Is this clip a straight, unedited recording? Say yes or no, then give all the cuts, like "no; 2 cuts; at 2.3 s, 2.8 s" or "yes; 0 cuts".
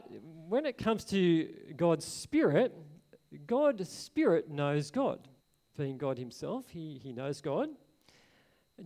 no; 1 cut; at 5.4 s